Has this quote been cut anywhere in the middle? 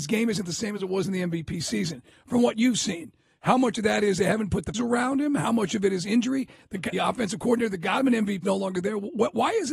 yes; 3 cuts; at 4.7 s, 6.9 s, 8.4 s

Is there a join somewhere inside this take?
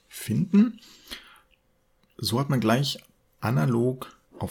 no; 0 cuts

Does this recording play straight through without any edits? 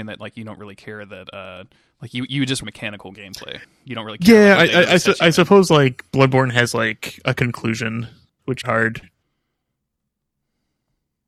no; 4 cuts; at 1.7 s, 2.6 s, 4.5 s, 8.6 s

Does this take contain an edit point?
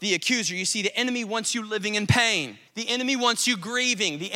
yes; 1 cut; at 2.7 s

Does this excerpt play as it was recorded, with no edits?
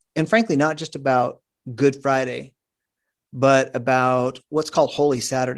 yes; 0 cuts

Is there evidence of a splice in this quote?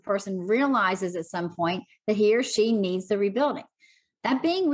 no; 0 cuts

